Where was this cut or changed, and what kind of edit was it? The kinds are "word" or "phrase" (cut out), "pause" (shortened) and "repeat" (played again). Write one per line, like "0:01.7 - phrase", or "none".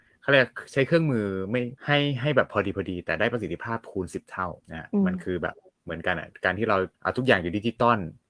0:01.8 - pause
0:04.6 - pause
0:06.9 - pause

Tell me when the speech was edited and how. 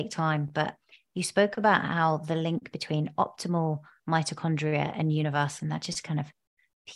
0:05.6 - word

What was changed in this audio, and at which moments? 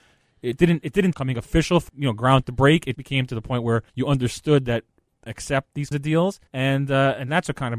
0:01.1 - phrase
0:01.9 - word
0:02.9 - word
0:03.9 - pause
0:05.3 - phrase
0:05.9 - word
0:06.5 - pause

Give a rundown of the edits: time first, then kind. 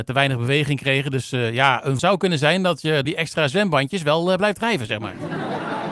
0:02.0 - word
0:03.0 - word

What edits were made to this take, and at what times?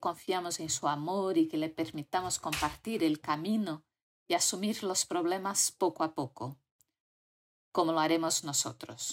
none

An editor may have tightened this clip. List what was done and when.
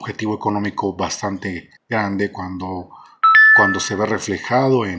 0:01.8 - pause

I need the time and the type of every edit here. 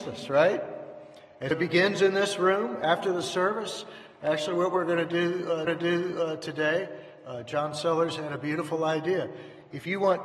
0:01.5 - word
0:05.7 - repeat

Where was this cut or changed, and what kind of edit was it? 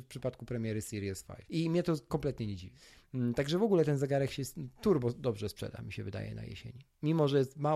none

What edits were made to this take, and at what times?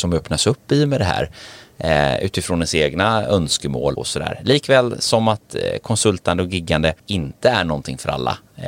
0:03.9 - word
0:07.0 - pause

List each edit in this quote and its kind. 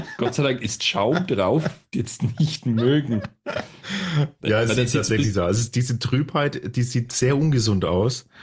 0:01.9 - phrase

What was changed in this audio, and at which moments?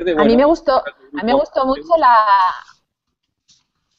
none

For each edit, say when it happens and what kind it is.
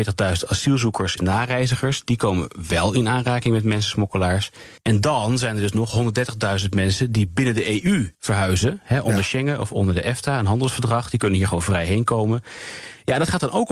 0:01.2 - word
0:04.8 - pause
0:08.1 - pause

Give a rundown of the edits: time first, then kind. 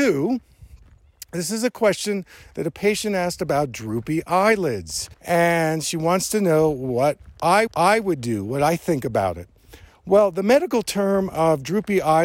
0:05.1 - pause
0:07.7 - repeat

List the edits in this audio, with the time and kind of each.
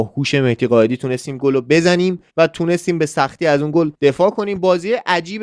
0:02.3 - pause
0:03.9 - pause

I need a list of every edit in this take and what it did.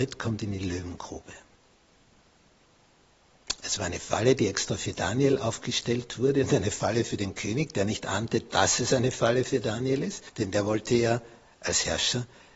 0:10.3 - pause

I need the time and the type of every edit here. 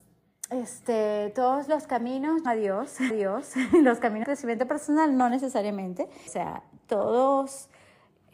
0:02.5 - word
0:03.1 - repeat
0:04.2 - word
0:06.3 - phrase

